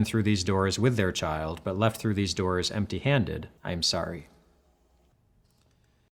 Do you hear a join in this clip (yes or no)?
yes